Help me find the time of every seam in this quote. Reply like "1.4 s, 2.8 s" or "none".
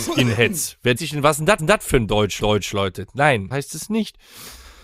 1.0 s, 1.6 s, 2.4 s, 3.5 s